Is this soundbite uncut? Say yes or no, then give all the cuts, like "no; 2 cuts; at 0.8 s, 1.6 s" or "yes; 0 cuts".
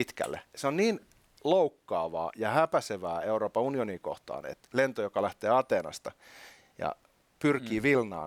yes; 0 cuts